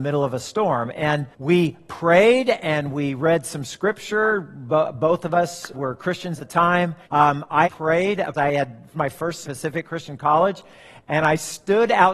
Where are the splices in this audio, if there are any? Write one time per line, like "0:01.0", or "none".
0:01.3
0:05.7
0:06.4
0:07.0
0:07.6
0:08.3
0:08.9
0:09.4

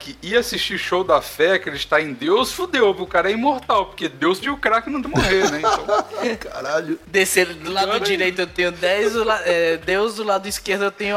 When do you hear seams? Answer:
0:04.4
0:05.0

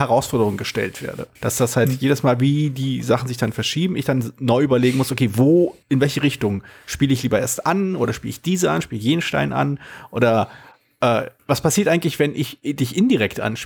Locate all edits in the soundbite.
0:01.4
0:05.8
0:11.4

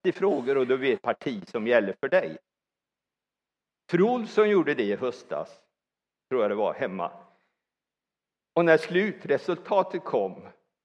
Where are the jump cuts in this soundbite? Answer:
0:01.0

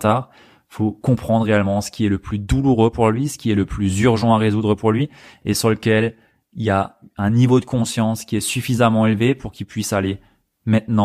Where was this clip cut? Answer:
none

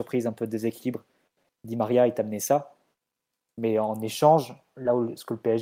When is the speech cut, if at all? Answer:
none

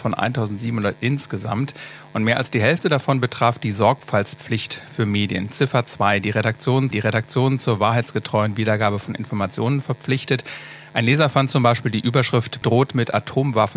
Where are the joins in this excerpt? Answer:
0:06.9
0:12.6

